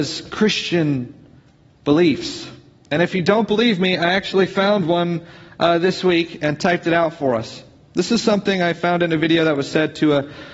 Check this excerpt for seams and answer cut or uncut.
uncut